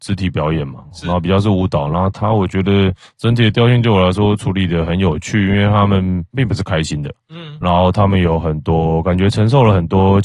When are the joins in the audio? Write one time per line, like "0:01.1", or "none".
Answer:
none